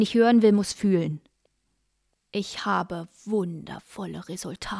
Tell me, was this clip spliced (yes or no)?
no